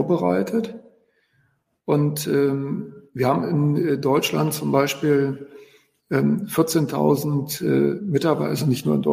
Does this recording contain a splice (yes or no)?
no